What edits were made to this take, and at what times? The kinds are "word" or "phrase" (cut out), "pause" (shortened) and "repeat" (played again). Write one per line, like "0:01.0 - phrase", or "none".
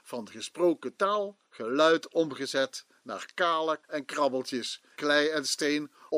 0:01.5 - pause
0:03.8 - word
0:05.0 - word